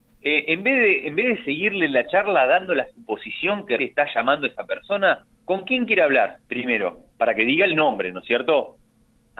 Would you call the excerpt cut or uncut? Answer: cut